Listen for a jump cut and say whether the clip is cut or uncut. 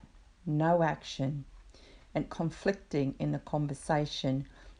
cut